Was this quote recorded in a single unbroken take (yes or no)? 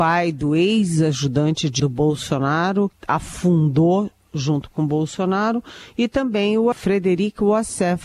no